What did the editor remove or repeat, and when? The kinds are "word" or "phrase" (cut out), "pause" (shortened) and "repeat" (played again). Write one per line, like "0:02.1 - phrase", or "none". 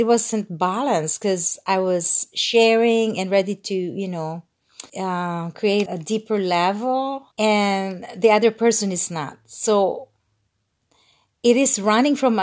0:04.9 - pause
0:05.9 - word
0:07.3 - pause